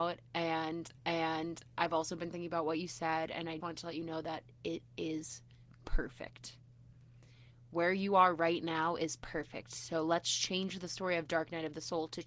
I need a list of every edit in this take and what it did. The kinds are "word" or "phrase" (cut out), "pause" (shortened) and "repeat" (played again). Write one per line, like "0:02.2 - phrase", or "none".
0:01.0 - repeat
0:03.6 - word